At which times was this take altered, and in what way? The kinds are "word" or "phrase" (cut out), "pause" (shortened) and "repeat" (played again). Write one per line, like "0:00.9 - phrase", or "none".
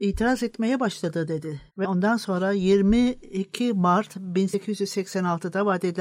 0:01.7 - pause